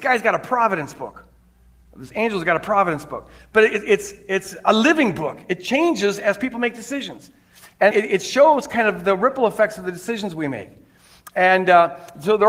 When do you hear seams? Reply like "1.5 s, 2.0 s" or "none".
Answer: 7.9 s